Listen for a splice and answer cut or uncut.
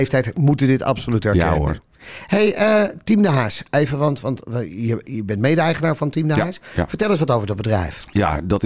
uncut